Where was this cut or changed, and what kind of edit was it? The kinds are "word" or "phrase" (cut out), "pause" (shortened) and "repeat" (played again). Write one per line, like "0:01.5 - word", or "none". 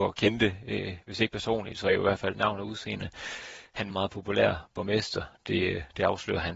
0:02.3 - phrase
0:03.9 - phrase